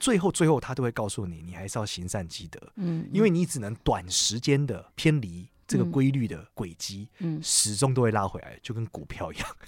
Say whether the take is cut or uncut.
cut